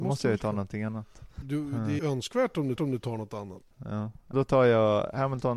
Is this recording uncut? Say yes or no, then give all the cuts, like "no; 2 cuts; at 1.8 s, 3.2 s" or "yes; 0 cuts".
no; 5 cuts; at 1.4 s, 2.0 s, 2.8 s, 3.7 s, 4.3 s